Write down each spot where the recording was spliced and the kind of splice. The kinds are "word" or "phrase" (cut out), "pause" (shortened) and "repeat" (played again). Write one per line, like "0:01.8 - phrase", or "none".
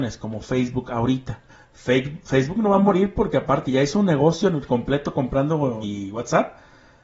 0:01.5 - pause
0:03.6 - word
0:05.8 - word